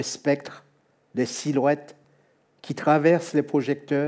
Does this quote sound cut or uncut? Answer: uncut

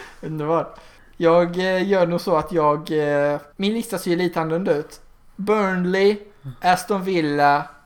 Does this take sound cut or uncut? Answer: cut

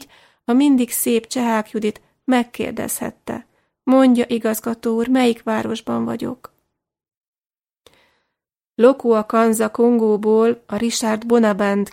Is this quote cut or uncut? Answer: uncut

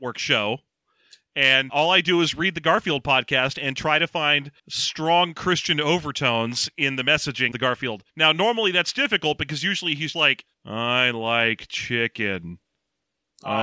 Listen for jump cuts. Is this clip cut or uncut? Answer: cut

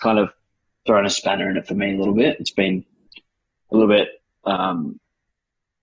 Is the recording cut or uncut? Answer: uncut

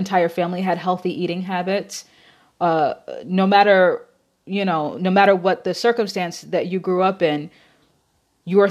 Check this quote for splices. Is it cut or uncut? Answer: uncut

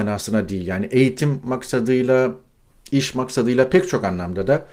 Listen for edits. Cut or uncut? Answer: uncut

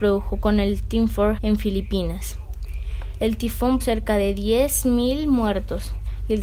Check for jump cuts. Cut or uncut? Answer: cut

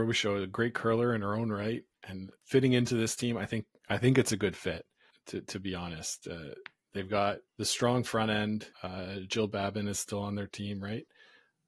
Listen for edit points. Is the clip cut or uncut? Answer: cut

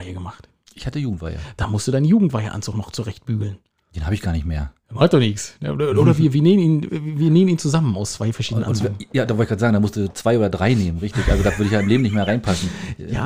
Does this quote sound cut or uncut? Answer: uncut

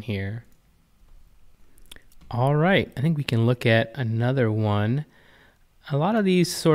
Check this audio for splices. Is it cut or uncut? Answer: uncut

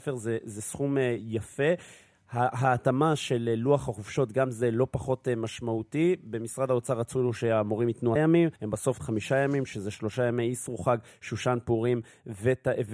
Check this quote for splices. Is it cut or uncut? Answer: cut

